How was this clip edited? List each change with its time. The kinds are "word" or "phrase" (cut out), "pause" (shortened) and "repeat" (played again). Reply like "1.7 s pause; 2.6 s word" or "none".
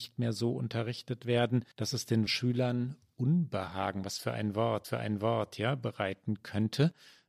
1.7 s pause; 2.3 s word; 4.8 s repeat